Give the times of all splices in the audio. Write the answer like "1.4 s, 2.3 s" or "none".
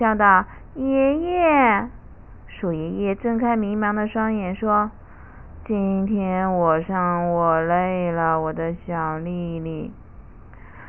none